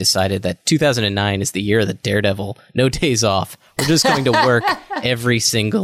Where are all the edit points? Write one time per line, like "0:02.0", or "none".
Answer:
none